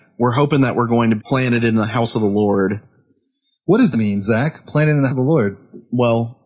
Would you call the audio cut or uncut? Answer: cut